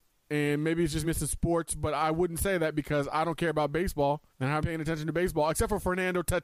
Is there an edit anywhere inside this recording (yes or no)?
yes